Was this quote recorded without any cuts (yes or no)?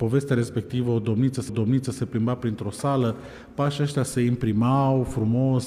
no